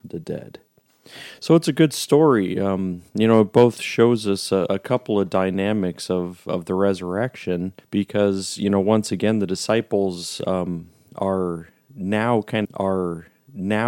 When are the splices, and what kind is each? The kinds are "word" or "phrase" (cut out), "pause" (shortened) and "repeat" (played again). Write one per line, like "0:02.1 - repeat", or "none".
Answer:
0:03.1 - pause
0:12.6 - repeat